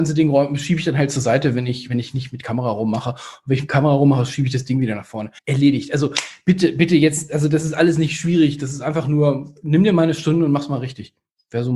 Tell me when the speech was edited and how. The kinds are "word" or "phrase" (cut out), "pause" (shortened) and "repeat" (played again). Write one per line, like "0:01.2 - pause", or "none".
0:05.4 - pause